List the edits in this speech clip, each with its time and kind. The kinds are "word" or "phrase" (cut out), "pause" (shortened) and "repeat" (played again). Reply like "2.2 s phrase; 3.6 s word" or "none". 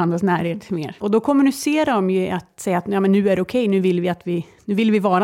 none